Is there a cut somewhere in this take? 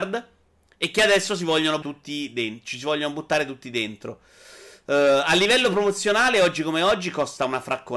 yes; 1 cut; at 1.8 s

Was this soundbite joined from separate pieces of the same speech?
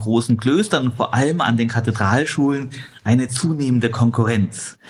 no; 0 cuts

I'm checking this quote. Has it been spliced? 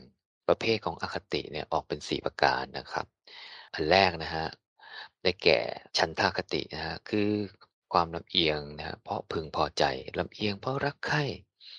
yes; 2 cuts; at 5.9 s, 7.7 s

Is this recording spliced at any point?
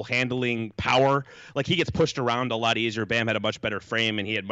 no; 0 cuts

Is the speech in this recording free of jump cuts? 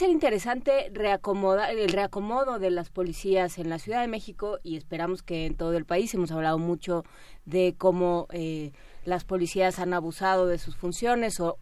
yes; 0 cuts

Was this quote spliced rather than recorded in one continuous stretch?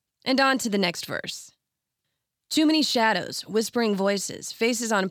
no; 0 cuts

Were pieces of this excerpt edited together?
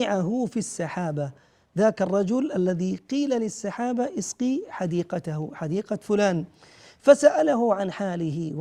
no; 0 cuts

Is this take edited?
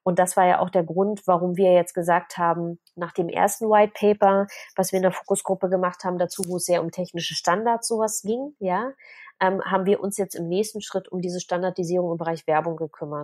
no; 0 cuts

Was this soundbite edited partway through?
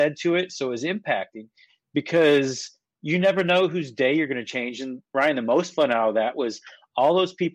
no; 0 cuts

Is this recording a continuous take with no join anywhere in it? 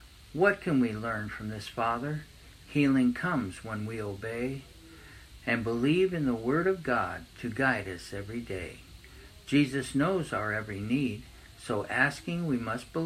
yes; 0 cuts

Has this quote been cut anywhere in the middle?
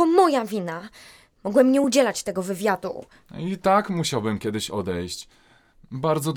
no; 0 cuts

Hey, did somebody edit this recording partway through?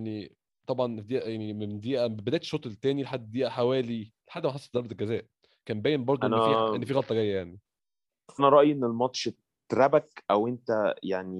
yes; 1 cut; at 8.4 s

